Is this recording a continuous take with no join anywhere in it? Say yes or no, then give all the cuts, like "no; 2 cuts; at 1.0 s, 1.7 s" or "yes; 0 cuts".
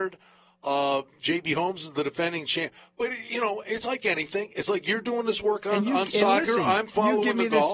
yes; 0 cuts